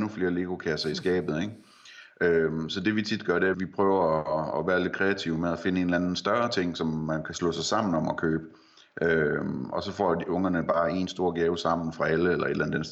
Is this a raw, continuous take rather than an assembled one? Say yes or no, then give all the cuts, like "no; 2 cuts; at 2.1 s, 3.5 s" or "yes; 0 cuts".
no; 1 cut; at 3.5 s